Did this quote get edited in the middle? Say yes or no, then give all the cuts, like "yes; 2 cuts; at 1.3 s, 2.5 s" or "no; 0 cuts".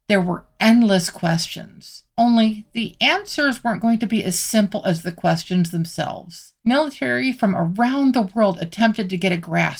yes; 2 cuts; at 2.1 s, 6.6 s